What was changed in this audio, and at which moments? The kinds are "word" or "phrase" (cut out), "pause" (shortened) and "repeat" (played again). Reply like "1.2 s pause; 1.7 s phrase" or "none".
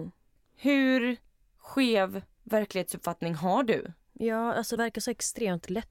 1.3 s pause; 4.8 s word